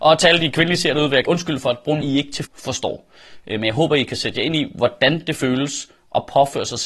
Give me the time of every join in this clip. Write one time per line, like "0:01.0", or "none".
0:01.3
0:02.0
0:02.4